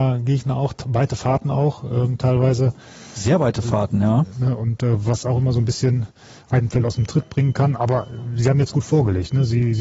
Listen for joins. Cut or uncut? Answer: uncut